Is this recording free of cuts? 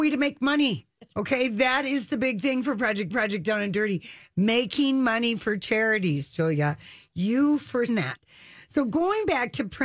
no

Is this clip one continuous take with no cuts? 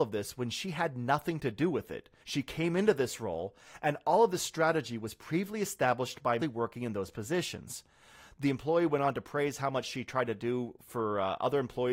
no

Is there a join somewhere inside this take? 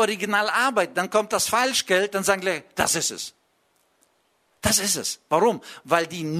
no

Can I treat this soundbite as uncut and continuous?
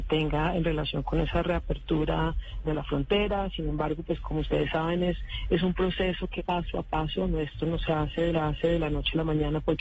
no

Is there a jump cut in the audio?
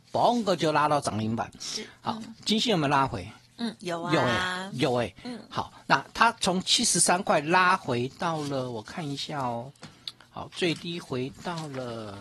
no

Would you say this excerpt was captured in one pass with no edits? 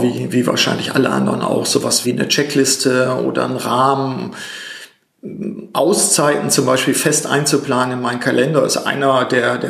no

